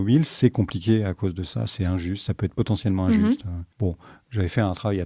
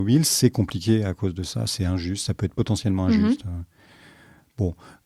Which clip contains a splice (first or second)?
first